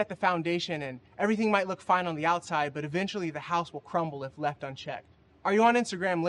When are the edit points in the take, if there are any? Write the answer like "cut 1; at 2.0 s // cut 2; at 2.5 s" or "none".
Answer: cut 1; at 1.1 s // cut 2; at 5.3 s

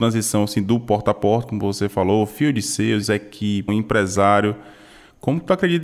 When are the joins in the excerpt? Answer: cut 1; at 3.0 s // cut 2; at 3.7 s

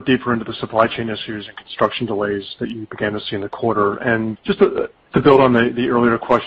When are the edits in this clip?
cut 1; at 4.4 s // cut 2; at 5.1 s

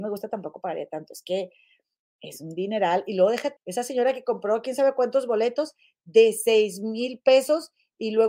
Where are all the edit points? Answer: cut 1; at 3.6 s

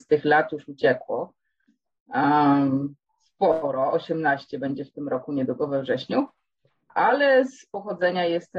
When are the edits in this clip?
none

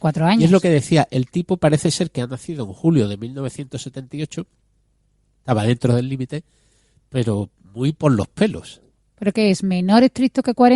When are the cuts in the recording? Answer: none

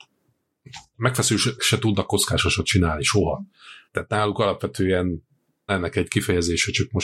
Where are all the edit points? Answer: cut 1; at 1.6 s // cut 2; at 3.9 s // cut 3; at 5.7 s

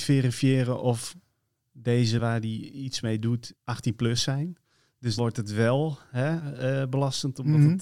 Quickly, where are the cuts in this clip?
cut 1; at 2.2 s // cut 2; at 3.6 s // cut 3; at 5.2 s

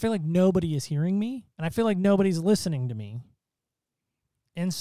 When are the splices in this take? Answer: cut 1; at 1.5 s

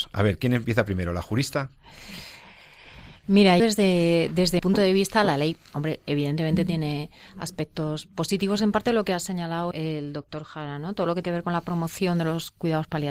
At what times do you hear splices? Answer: cut 1; at 3.6 s // cut 2; at 4.6 s // cut 3; at 9.7 s // cut 4; at 11.2 s

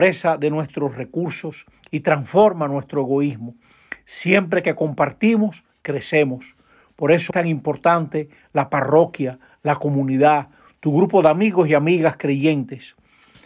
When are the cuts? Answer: cut 1; at 7.3 s

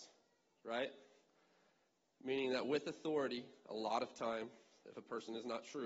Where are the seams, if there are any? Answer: none

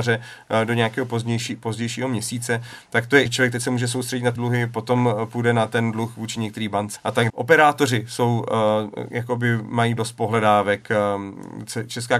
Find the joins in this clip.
cut 1; at 3.3 s // cut 2; at 4.4 s // cut 3; at 7.0 s // cut 4; at 7.3 s // cut 5; at 10.0 s

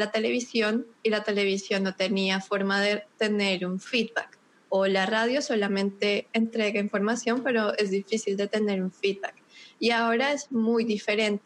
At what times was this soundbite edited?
none

